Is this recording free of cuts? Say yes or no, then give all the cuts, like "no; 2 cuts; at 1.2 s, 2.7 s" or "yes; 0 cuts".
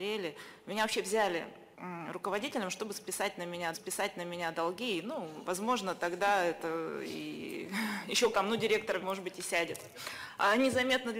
no; 4 cuts; at 1.7 s, 3.7 s, 8.3 s, 9.0 s